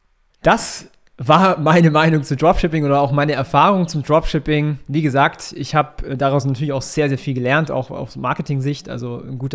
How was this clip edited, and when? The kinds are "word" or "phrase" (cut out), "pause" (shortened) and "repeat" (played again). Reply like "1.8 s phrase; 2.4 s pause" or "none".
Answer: none